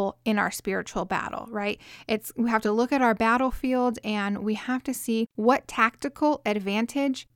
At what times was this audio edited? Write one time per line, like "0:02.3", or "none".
none